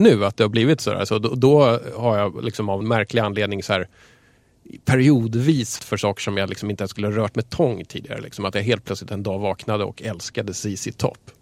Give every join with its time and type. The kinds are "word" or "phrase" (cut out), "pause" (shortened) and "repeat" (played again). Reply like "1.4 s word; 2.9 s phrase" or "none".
2.8 s word; 5.8 s word